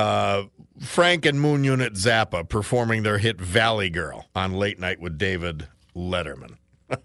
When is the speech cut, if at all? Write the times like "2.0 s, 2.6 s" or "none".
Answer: 4.3 s